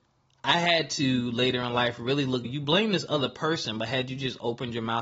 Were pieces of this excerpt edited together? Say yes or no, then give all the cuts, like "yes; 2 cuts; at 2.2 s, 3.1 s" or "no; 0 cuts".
yes; 1 cut; at 2.4 s